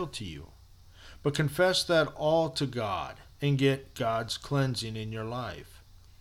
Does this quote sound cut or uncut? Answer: cut